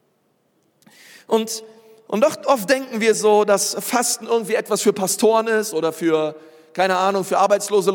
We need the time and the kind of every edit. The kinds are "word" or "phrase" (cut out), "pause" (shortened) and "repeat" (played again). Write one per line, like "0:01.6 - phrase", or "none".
none

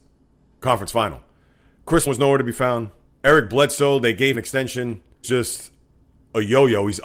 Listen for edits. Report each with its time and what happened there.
0:02.1 - word
0:03.0 - pause
0:04.3 - word
0:05.2 - phrase

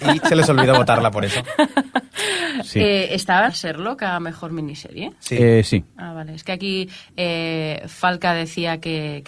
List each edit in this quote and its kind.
0:03.5 - word

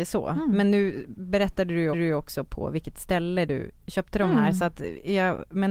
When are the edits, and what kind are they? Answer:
0:01.9 - repeat

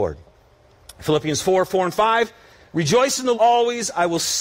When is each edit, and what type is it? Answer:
0:03.3 - word

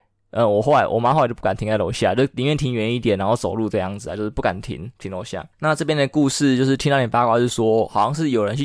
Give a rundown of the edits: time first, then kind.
0:05.5 - pause

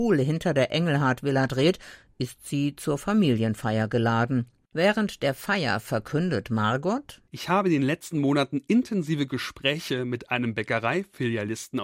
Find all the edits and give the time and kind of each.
none

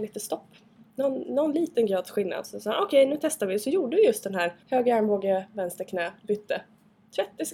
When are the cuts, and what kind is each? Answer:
0:04.6 - pause
0:06.2 - pause

